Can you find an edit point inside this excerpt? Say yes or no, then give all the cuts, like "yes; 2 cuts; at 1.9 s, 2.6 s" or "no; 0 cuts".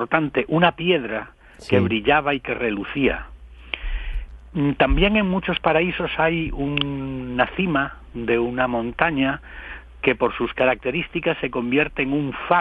no; 0 cuts